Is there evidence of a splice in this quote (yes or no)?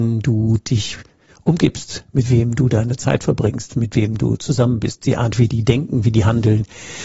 no